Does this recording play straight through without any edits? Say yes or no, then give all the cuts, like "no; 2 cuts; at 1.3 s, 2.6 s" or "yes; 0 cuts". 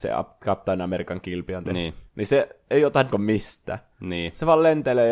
no; 2 cuts; at 2.1 s, 3.1 s